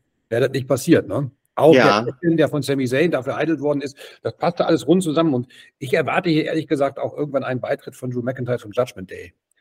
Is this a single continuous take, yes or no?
yes